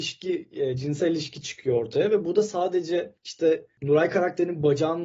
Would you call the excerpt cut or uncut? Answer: uncut